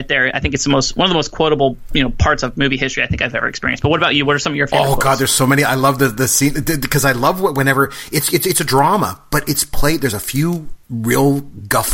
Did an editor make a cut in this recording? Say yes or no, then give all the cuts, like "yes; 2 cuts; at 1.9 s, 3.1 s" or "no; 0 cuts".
yes; 1 cut; at 10.8 s